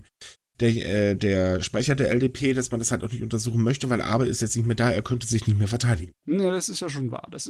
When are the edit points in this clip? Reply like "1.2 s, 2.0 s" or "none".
6.2 s